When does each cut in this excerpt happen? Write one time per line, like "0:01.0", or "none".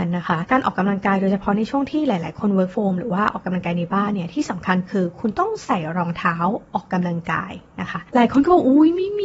0:02.7